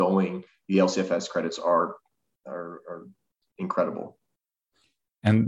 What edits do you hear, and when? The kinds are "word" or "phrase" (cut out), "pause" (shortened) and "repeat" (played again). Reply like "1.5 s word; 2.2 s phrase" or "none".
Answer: none